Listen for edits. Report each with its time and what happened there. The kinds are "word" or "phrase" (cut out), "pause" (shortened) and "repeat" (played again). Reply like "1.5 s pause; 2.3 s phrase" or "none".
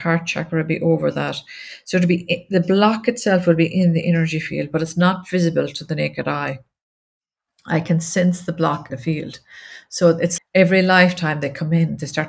8.9 s word; 10.4 s word